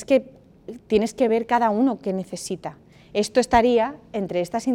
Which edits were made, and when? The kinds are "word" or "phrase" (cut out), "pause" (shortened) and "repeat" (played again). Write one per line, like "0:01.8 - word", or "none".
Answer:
none